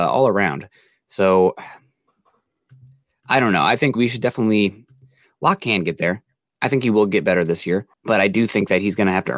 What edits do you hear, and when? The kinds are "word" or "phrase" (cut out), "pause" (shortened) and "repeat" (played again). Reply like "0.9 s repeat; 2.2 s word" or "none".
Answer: 3.9 s word; 7.9 s pause